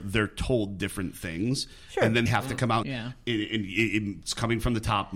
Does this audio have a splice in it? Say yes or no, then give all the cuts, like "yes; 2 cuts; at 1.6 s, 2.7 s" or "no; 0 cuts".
yes; 2 cuts; at 2.3 s, 2.8 s